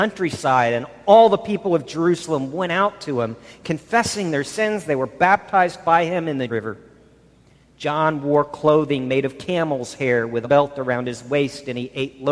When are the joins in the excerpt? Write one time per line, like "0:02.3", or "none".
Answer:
0:06.5
0:10.4